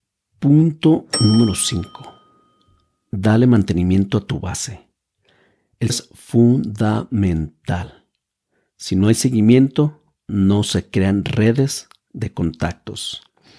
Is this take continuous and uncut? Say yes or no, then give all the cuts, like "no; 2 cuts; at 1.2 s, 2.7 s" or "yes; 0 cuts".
no; 1 cut; at 5.9 s